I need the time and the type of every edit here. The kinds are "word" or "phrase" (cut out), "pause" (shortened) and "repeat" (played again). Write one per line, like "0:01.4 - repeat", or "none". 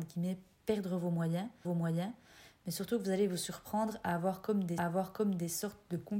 0:01.6 - repeat
0:04.8 - repeat